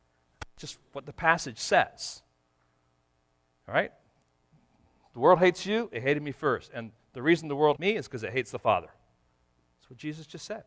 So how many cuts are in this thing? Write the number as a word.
one